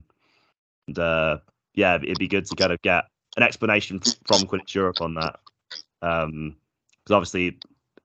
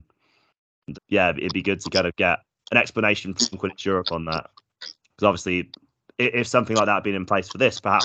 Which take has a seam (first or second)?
second